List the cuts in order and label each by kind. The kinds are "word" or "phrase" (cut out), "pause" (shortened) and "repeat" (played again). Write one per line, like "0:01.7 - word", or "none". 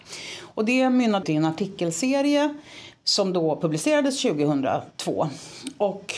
0:01.2 - word